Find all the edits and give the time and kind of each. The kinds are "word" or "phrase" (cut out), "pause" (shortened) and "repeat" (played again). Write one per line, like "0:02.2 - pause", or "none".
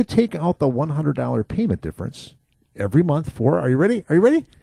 none

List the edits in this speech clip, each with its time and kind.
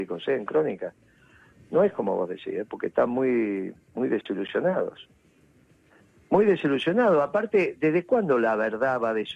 none

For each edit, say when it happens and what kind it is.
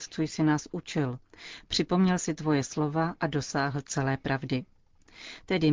0:03.2 - phrase

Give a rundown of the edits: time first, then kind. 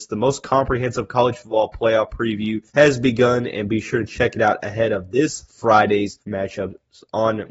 0:02.7 - pause
0:06.2 - pause

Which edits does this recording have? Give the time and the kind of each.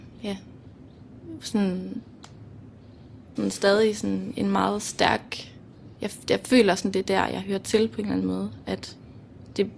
0:03.4 - phrase
0:05.9 - pause

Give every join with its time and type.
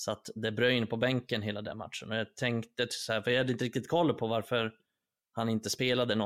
none

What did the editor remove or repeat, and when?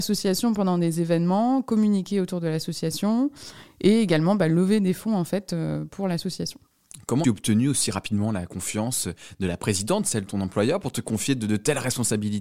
0:07.2 - word
0:10.3 - word

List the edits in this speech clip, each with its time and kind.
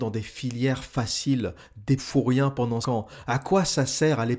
0:02.0 - phrase
0:02.8 - word

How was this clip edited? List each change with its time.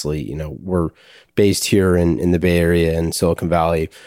none

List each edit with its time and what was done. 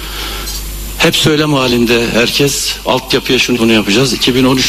0:03.6 - word

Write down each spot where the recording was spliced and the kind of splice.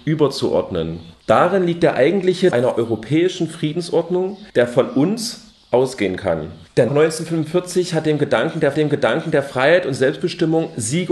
0:02.5 - phrase
0:04.5 - pause
0:06.9 - phrase
0:08.7 - repeat

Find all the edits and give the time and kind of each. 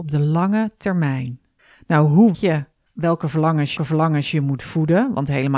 0:01.6 - pause
0:02.3 - word
0:02.9 - pause
0:03.8 - repeat

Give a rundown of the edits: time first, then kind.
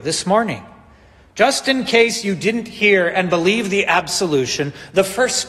none

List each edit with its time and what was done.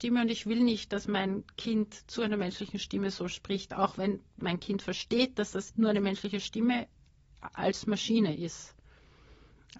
0:05.7 - word

